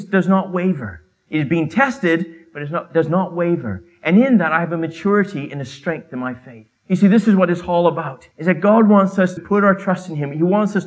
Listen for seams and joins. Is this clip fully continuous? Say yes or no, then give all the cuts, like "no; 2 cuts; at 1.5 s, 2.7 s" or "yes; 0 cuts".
no; 3 cuts; at 6.8 s, 8.3 s, 9.4 s